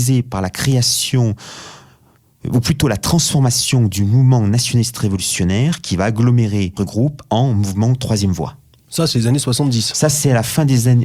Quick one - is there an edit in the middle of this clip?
yes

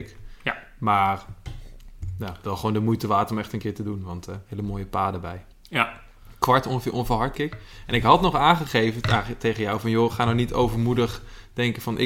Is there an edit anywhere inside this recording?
yes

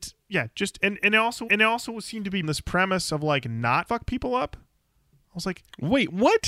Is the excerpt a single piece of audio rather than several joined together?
no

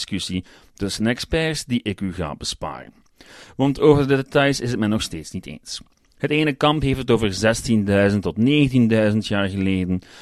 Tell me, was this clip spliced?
no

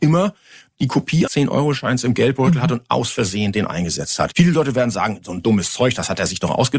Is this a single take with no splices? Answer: no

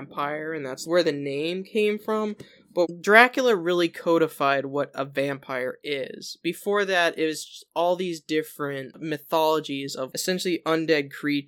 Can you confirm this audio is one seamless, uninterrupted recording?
yes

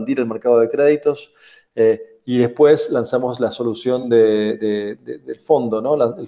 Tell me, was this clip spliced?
no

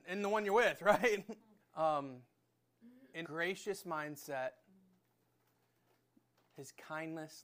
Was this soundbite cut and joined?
yes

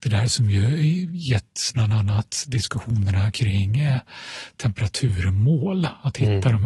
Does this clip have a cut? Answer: no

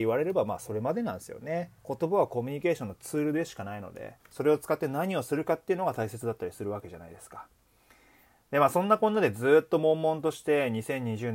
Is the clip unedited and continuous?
no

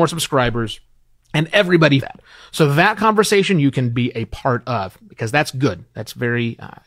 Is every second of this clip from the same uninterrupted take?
no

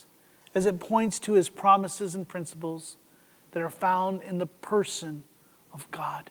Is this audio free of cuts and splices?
yes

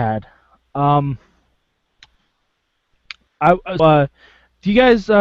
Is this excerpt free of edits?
no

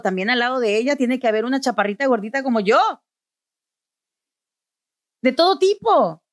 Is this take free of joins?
yes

